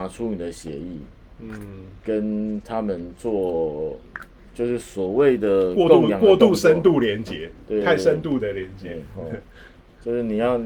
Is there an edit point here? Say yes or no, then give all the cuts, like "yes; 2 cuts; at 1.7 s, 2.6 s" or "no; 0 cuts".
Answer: no; 0 cuts